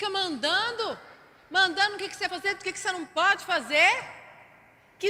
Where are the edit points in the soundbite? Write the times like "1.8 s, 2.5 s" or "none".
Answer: 2.3 s